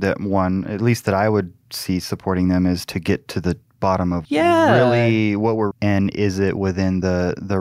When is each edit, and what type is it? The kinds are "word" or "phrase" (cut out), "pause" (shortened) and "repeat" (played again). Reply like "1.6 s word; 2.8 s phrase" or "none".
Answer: 4.2 s word; 5.7 s phrase